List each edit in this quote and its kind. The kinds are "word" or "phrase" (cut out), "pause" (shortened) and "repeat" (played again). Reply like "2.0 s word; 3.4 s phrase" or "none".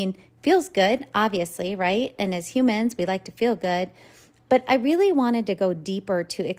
none